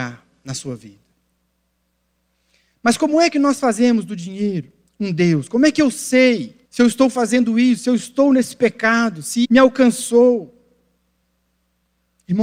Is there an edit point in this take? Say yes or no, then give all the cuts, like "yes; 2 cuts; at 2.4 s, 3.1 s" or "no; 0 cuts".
yes; 3 cuts; at 4.9 s, 6.6 s, 9.4 s